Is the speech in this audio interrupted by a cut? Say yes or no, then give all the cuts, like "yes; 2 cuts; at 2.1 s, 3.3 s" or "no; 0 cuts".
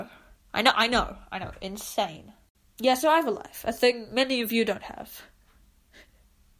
no; 0 cuts